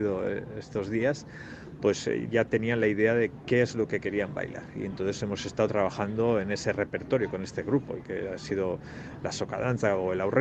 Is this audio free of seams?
yes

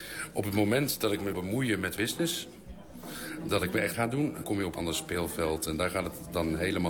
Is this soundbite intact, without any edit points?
no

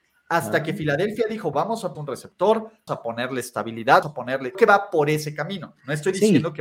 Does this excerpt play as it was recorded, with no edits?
no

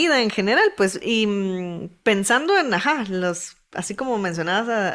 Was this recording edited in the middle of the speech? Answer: yes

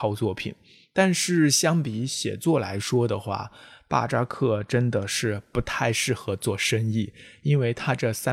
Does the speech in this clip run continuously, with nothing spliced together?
yes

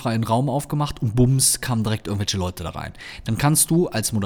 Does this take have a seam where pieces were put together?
no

